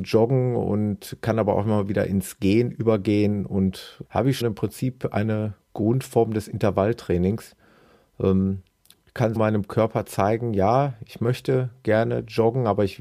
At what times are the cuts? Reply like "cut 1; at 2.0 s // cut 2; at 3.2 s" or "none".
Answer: cut 1; at 4.0 s // cut 2; at 4.4 s // cut 3; at 9.4 s